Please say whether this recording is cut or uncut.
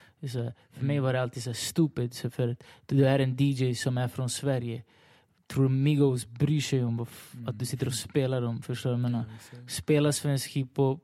uncut